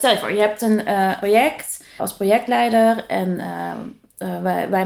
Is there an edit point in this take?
yes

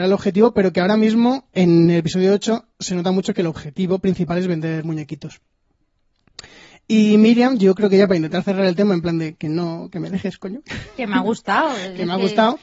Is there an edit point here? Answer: no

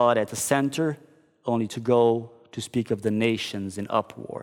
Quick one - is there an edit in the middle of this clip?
no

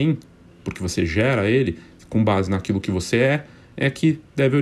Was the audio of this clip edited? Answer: no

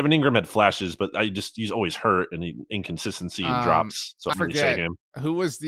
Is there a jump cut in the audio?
yes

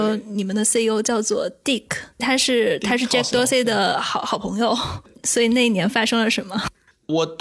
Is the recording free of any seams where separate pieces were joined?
yes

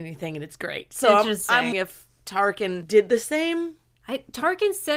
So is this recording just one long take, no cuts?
no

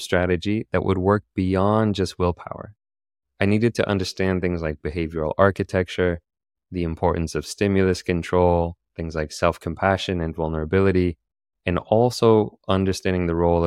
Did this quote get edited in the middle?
no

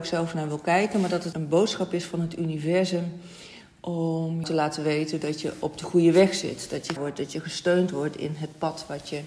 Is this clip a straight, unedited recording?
no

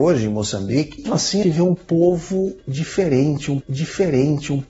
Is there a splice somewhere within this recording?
yes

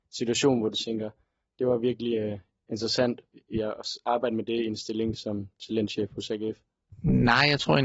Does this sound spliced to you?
no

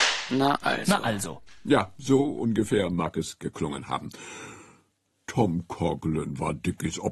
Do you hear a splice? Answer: no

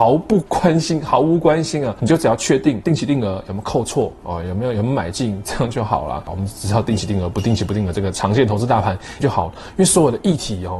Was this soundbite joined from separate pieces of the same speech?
yes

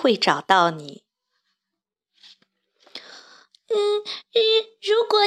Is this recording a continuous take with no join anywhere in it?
yes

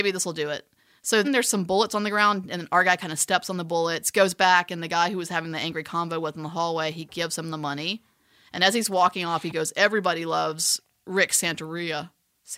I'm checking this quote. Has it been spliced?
yes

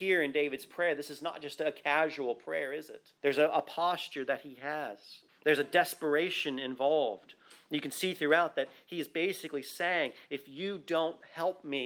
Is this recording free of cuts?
no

